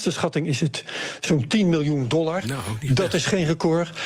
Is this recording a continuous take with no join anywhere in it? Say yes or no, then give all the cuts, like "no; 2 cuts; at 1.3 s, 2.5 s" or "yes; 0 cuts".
yes; 0 cuts